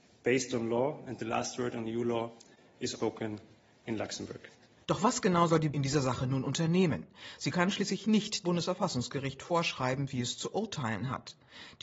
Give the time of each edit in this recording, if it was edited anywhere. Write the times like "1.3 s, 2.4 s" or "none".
2.9 s, 5.7 s, 8.4 s